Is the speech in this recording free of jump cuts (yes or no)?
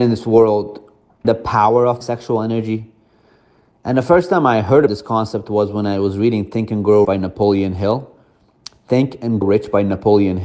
no